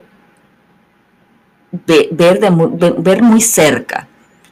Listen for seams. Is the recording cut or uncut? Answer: uncut